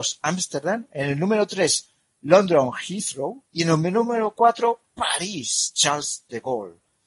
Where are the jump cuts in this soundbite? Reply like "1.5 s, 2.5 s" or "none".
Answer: 3.4 s

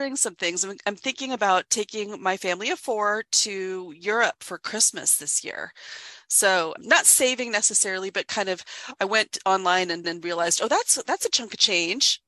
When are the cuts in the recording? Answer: 6.8 s, 10.0 s

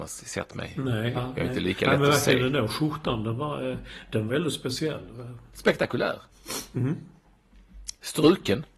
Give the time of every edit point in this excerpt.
1.2 s, 4.3 s

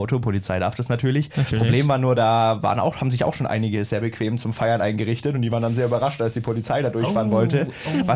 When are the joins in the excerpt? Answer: none

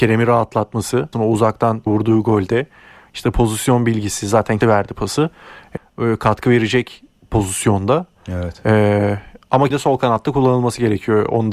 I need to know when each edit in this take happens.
1.1 s, 1.9 s, 4.6 s, 5.8 s, 9.7 s

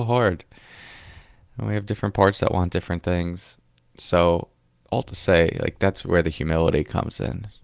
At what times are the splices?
none

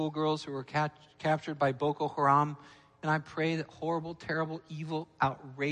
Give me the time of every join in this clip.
none

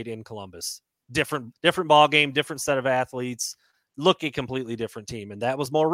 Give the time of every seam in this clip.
1.5 s, 4.2 s

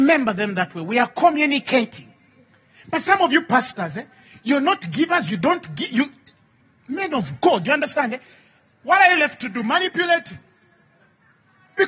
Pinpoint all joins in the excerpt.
none

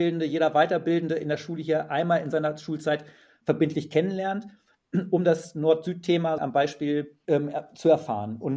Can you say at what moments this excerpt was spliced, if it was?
6.4 s, 7.2 s

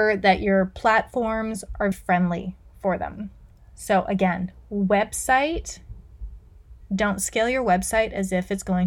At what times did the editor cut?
1.9 s, 6.8 s

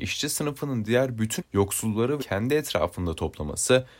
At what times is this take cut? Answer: 1.4 s, 2.2 s

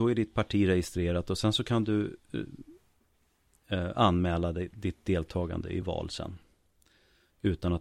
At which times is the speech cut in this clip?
5.8 s

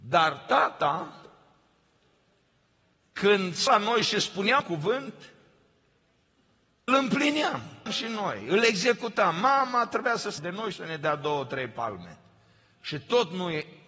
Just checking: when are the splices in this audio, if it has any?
3.7 s, 4.6 s, 6.9 s, 7.9 s, 10.4 s, 10.7 s

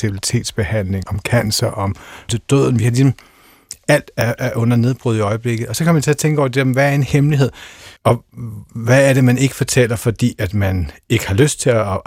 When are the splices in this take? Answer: 1.0 s, 2.3 s, 8.0 s

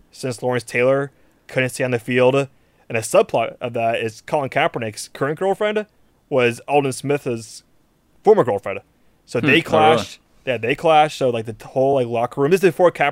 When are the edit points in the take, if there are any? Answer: none

